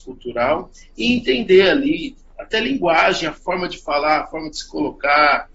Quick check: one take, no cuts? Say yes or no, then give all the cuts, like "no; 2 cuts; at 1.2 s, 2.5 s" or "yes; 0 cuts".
yes; 0 cuts